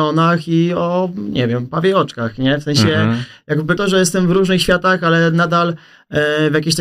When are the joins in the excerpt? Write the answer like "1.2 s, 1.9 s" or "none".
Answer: 3.8 s